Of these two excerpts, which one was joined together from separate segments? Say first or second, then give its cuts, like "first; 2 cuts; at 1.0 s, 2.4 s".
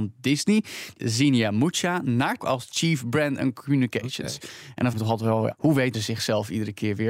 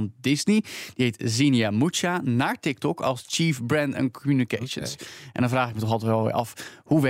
first; 5 cuts; at 1.0 s, 2.4 s, 4.9 s, 5.5 s, 5.9 s